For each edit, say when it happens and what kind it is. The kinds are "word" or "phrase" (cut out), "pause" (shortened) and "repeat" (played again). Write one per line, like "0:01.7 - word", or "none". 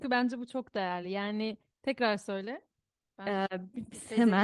none